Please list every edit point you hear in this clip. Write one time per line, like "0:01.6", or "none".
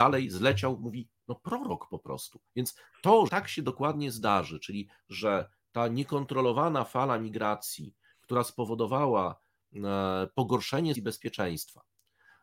0:02.5
0:03.3
0:05.0
0:10.9